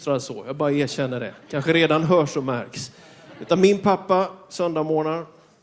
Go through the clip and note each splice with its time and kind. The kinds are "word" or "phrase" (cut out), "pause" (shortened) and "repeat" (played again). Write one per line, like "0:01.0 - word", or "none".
none